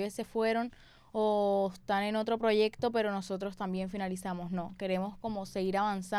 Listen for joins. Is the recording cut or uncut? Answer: uncut